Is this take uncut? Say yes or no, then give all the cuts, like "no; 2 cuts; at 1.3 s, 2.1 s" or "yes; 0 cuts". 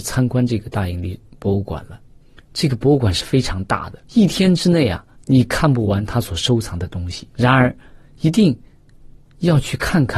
no; 5 cuts; at 1.3 s, 2.2 s, 4.0 s, 5.1 s, 7.3 s